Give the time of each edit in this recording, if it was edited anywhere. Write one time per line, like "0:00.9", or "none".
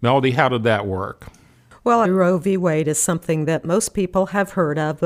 0:02.0